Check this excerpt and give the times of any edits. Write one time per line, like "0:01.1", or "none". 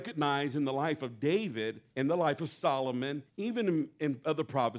0:01.9
0:03.3